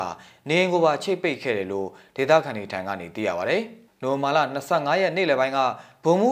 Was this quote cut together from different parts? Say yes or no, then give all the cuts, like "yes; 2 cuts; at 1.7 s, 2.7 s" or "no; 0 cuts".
no; 0 cuts